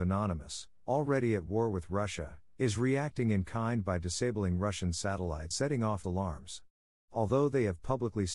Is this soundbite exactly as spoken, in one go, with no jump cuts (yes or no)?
no